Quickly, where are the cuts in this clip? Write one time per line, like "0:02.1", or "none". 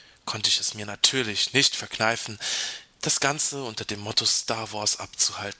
none